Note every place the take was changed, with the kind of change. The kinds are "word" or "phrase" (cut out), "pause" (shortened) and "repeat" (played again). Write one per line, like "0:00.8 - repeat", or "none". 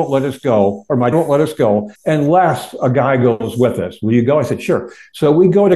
0:01.1 - word
0:02.0 - pause